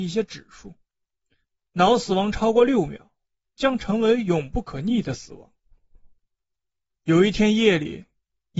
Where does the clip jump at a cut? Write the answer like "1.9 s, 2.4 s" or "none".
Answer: none